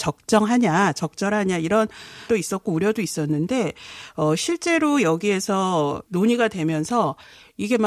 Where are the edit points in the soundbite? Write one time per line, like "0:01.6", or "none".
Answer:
0:02.3

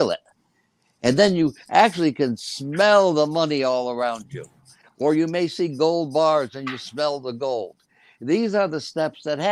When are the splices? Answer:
none

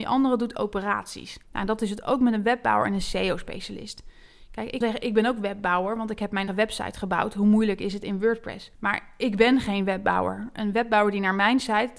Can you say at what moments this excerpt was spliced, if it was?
0:01.4
0:04.8
0:06.5
0:08.7

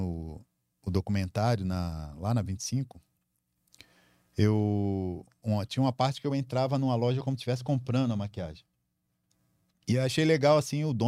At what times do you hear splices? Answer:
none

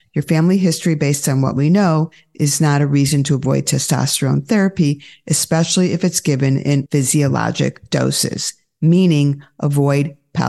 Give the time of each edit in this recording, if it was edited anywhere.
0:06.9

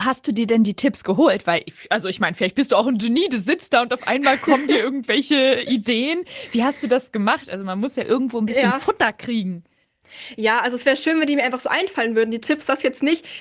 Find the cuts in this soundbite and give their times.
none

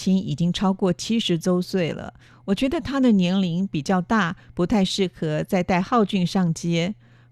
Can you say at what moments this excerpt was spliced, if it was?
none

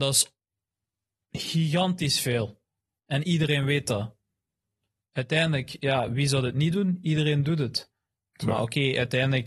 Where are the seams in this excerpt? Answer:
none

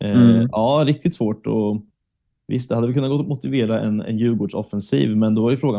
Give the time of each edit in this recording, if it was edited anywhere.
none

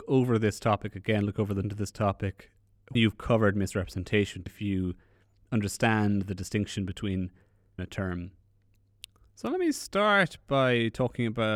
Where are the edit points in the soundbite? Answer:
0:01.6
0:03.0
0:04.5
0:07.8

